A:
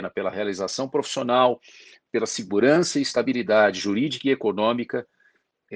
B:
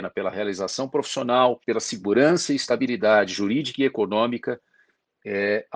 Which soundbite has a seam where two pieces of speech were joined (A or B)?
B